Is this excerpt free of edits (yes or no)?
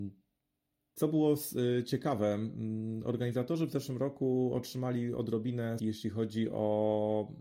no